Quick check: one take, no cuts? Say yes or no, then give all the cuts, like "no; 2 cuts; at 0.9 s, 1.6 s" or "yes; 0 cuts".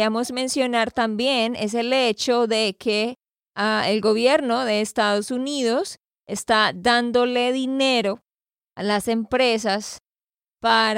yes; 0 cuts